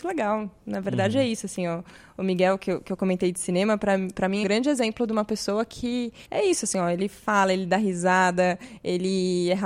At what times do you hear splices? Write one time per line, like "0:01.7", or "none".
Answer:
0:04.4
0:06.2